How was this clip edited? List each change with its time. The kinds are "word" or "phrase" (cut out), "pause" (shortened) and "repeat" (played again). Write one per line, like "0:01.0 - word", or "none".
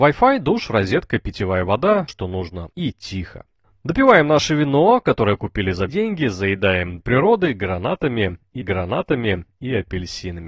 0:02.1 - word
0:02.7 - pause
0:03.6 - pause
0:05.9 - word
0:07.0 - word
0:08.6 - repeat